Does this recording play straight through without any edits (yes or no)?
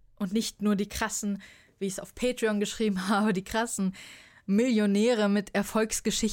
yes